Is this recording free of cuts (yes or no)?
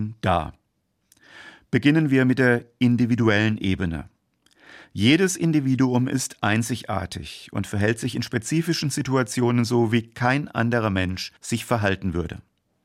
no